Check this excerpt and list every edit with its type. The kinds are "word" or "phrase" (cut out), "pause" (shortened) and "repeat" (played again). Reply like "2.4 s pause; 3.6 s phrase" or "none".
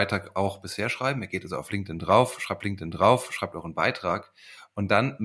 2.6 s repeat